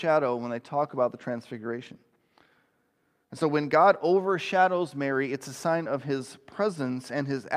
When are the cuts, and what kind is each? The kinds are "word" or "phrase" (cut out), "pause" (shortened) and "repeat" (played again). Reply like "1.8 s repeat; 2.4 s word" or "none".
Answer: none